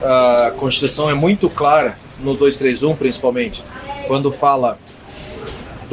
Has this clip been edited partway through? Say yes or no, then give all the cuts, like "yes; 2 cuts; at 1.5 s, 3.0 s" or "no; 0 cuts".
no; 0 cuts